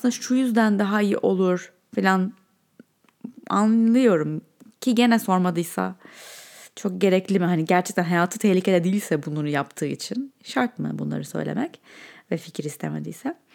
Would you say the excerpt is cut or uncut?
uncut